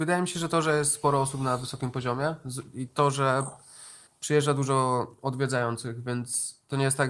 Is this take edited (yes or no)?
yes